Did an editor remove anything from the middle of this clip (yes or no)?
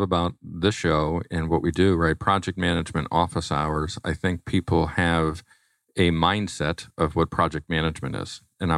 no